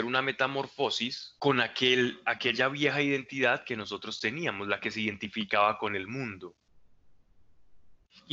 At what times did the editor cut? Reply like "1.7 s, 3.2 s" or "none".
1.4 s